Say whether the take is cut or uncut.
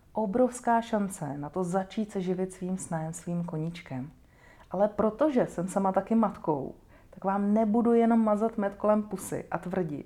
uncut